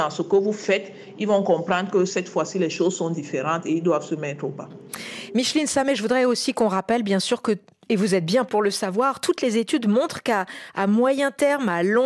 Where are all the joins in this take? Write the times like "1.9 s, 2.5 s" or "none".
8.5 s

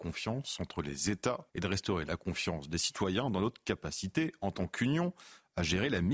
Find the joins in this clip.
1.5 s

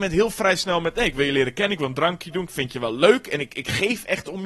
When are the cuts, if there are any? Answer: none

